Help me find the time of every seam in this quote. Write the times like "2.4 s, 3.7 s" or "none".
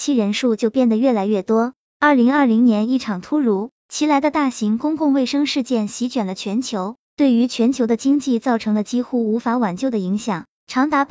3.8 s